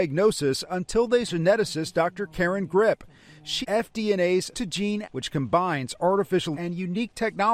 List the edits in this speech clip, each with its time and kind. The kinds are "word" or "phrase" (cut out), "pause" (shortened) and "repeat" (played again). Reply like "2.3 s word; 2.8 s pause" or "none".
1.3 s word; 3.6 s word; 4.5 s word; 5.0 s word; 6.5 s word